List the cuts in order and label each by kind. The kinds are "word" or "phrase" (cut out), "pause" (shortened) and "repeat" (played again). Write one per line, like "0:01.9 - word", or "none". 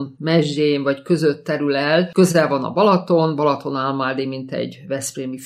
none